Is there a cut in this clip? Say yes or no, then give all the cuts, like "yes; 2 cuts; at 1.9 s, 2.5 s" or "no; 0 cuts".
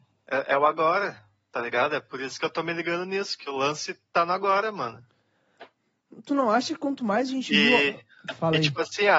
no; 0 cuts